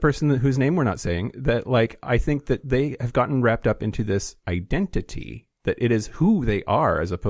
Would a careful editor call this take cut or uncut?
uncut